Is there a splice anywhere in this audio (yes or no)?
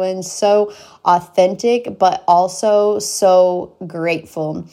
no